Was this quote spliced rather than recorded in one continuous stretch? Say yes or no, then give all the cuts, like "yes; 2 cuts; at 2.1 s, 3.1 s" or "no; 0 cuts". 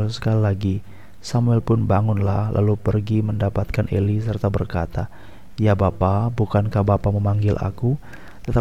no; 0 cuts